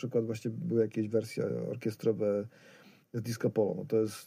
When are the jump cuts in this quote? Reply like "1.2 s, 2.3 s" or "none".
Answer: none

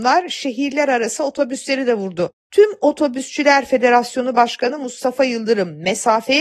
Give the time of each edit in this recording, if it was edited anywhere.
none

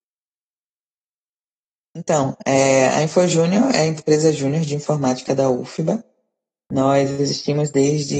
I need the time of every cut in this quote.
none

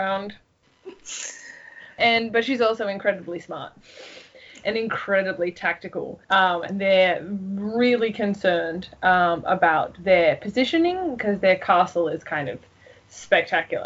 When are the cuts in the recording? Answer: 6.2 s

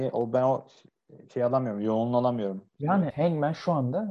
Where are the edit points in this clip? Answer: 1.2 s, 3.1 s

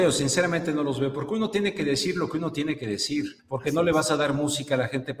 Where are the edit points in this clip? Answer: 3.4 s

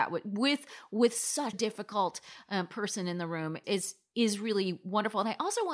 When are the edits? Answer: 1.5 s, 3.6 s

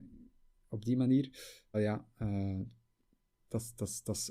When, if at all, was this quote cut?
1.7 s

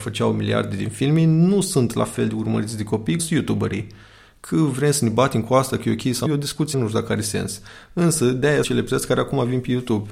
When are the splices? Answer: 3.2 s, 6.3 s, 6.7 s, 8.6 s

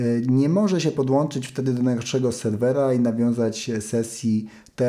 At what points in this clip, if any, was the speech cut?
none

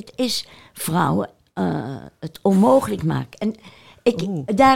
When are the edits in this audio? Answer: 1.4 s

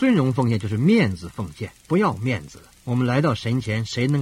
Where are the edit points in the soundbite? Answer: 1.8 s, 2.8 s

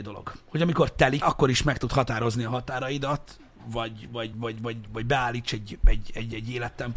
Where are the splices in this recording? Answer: 1.2 s, 4.3 s

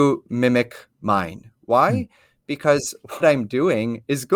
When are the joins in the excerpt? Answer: 3.2 s

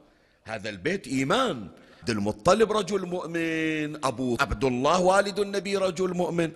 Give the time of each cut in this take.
1.0 s, 2.0 s, 4.4 s

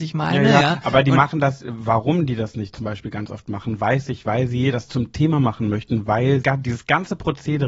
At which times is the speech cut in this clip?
4.9 s, 6.4 s

